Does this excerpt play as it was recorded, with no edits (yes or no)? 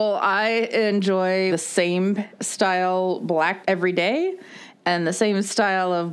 no